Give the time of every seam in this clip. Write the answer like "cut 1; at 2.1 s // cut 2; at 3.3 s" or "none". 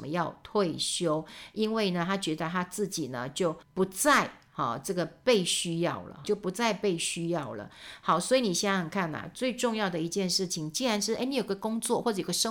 cut 1; at 3.6 s // cut 2; at 6.2 s

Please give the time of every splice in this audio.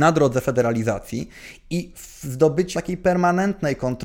cut 1; at 2.7 s

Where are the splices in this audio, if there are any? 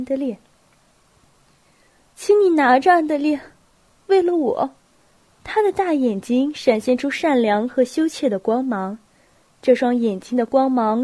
cut 1; at 4.8 s

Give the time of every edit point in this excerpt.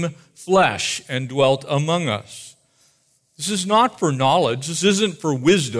none

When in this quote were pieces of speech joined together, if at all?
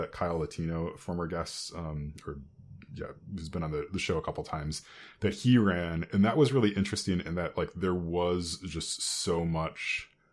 none

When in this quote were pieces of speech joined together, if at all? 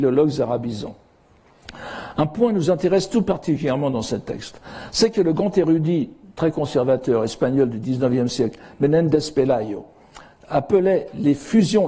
none

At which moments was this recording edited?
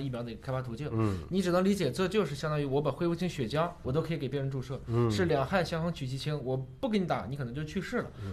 cut 1; at 3.8 s

